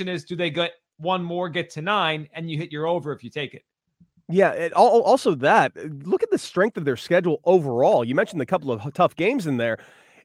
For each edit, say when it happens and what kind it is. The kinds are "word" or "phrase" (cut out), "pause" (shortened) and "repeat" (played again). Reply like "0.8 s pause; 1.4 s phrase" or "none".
none